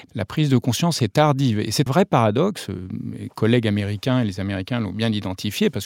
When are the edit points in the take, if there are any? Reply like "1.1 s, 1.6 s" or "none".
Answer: 1.9 s

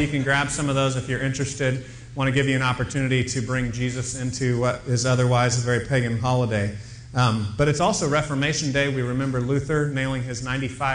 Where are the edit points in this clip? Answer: none

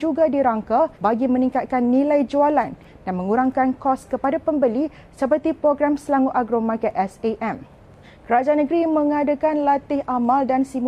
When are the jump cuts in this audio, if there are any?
0.9 s, 8.0 s

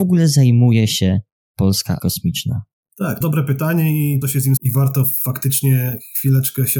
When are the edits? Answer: 2.0 s, 3.2 s, 4.2 s, 4.6 s

